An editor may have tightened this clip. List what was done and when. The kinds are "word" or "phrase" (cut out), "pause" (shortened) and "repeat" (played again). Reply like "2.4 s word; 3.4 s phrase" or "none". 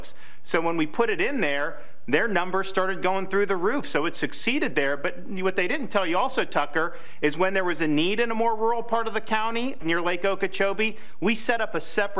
9.8 s word